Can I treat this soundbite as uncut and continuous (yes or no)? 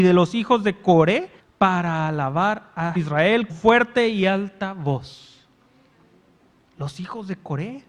no